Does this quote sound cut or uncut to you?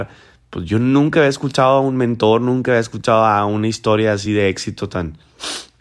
uncut